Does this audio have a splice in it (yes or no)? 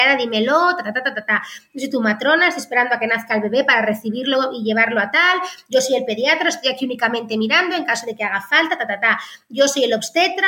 no